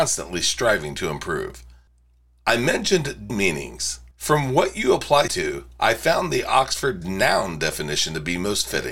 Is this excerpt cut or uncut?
cut